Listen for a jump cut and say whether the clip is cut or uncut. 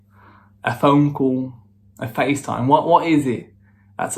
uncut